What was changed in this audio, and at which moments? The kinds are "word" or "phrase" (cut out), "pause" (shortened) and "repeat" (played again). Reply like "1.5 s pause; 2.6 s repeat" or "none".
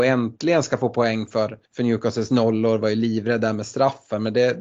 1.7 s pause